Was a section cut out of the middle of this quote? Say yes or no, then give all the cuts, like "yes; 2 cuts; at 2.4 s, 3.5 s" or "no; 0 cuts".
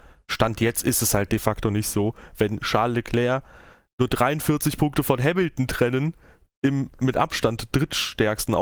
no; 0 cuts